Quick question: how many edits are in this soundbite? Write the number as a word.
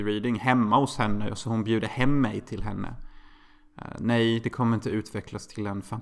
zero